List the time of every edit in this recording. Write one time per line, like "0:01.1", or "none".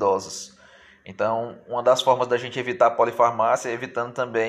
none